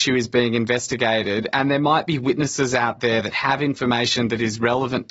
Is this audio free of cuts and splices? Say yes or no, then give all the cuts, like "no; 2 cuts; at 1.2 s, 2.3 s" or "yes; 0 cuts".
yes; 0 cuts